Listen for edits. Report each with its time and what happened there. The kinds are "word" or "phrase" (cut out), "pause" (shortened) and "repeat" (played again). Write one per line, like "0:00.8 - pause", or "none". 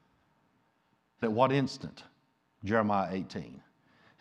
0:01.2 - word